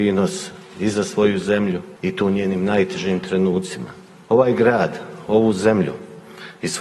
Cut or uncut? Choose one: uncut